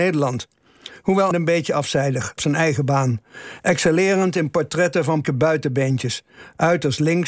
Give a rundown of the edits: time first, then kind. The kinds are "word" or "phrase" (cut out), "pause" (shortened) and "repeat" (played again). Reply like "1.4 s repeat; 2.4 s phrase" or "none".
1.3 s word; 2.4 s phrase; 5.2 s word